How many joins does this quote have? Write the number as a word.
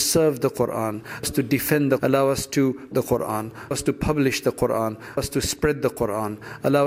five